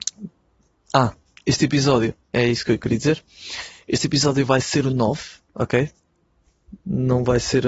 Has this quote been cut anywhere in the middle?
no; 0 cuts

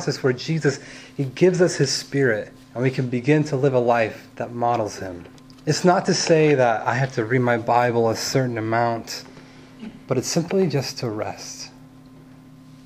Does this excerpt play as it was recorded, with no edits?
no; 3 cuts; at 2.6 s, 4.3 s, 5.4 s

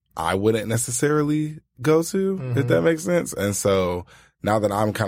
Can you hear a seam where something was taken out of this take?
no; 0 cuts

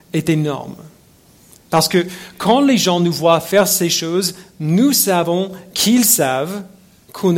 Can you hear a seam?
no; 0 cuts

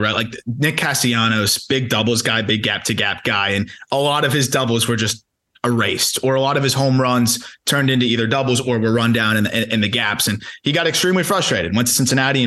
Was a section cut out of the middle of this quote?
no; 0 cuts

